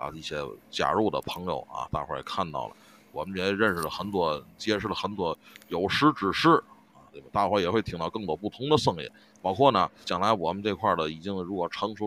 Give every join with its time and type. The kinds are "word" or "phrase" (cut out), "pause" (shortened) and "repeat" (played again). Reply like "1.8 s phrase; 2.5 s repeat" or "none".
10.0 s word

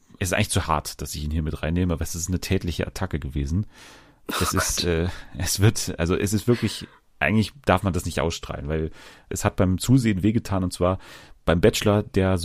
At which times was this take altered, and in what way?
none

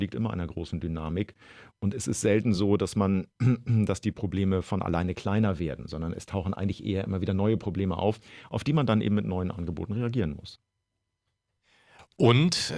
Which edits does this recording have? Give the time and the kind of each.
none

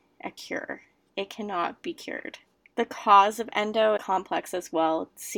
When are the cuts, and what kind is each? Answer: 4.0 s word

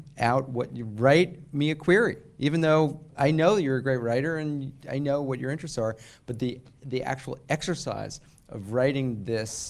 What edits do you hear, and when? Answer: none

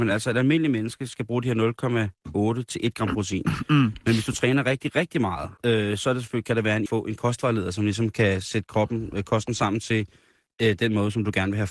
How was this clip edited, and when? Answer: 5.6 s pause; 6.9 s phrase

